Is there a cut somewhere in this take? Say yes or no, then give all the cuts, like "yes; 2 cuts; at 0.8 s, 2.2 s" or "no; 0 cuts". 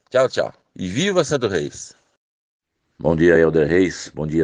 no; 0 cuts